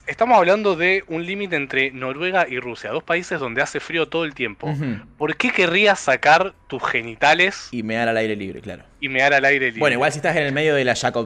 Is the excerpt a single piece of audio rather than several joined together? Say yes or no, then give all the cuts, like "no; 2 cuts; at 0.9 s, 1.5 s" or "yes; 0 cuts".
yes; 0 cuts